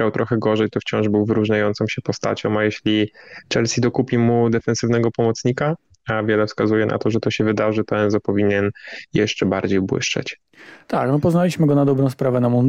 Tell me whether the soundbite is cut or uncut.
uncut